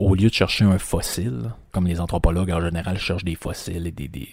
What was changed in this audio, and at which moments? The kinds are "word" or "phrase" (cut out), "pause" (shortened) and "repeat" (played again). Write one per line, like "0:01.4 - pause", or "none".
0:01.7 - word